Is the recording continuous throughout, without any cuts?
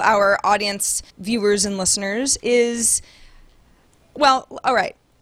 no; 1 cut; at 1.1 s

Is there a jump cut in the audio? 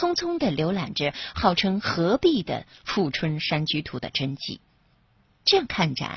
no; 0 cuts

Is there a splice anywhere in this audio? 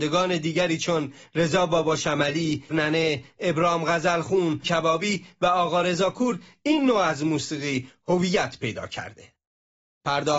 yes; 2 cuts; at 2.7 s, 4.6 s

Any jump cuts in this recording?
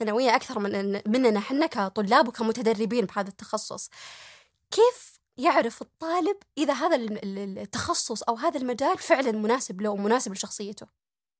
no; 0 cuts

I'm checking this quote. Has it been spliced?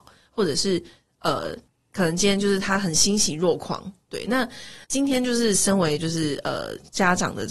yes; 2 cuts; at 1.7 s, 4.8 s

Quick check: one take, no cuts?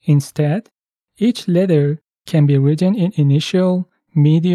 yes; 0 cuts

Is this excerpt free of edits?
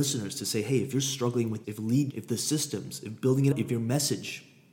no; 3 cuts; at 1.6 s, 2.1 s, 3.5 s

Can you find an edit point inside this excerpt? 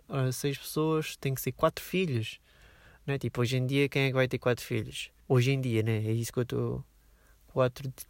yes; 1 cut; at 5.2 s

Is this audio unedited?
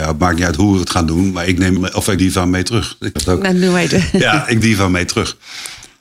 no; 4 cuts; at 1.8 s, 2.2 s, 3.2 s, 4.6 s

